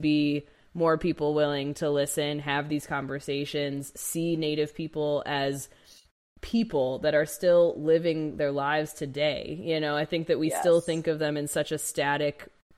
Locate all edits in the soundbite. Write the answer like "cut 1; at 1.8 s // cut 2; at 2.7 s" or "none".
none